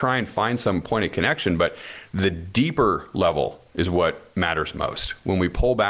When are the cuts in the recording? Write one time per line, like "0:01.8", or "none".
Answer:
none